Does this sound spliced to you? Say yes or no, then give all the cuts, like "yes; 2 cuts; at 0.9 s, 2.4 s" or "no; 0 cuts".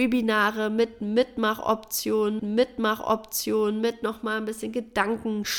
yes; 1 cut; at 2.4 s